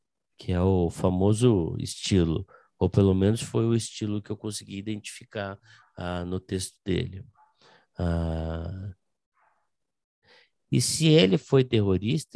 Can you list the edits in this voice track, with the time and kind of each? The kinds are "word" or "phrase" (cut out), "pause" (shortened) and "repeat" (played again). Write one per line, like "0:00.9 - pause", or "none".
none